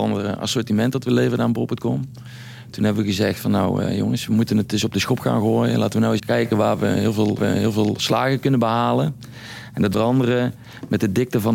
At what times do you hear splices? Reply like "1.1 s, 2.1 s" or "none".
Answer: 6.2 s, 7.4 s, 9.9 s